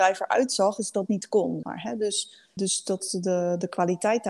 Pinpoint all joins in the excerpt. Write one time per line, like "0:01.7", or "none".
0:01.1
0:01.6
0:02.6